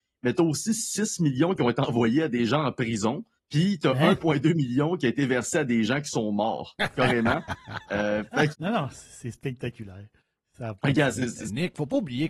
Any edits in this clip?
yes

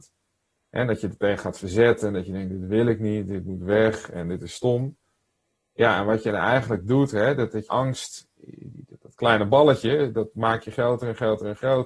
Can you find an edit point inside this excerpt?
yes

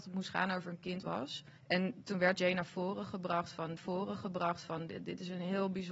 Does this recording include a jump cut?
yes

